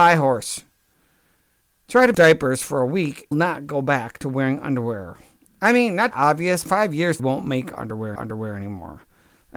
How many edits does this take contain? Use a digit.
6